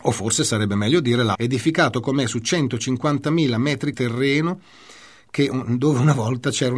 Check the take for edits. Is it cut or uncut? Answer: cut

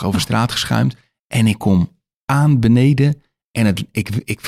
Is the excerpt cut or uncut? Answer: uncut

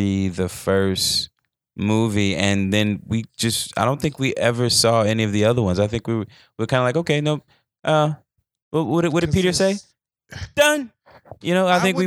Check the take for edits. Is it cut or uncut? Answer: uncut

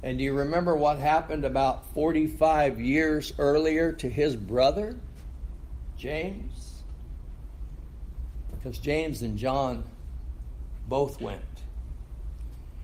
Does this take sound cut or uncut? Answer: uncut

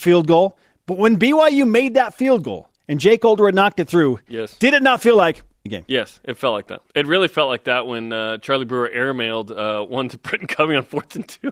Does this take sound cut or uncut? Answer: cut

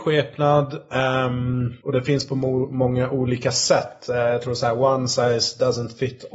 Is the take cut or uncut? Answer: cut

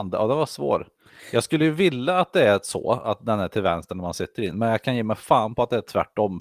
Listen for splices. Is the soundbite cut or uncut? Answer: uncut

